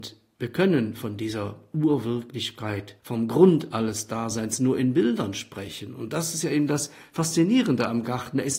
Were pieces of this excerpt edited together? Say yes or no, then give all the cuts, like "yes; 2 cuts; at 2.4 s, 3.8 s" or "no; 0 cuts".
yes; 1 cut; at 3.0 s